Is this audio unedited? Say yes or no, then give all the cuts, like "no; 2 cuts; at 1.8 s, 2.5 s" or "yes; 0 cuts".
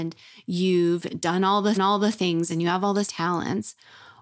no; 2 cuts; at 1.8 s, 3.1 s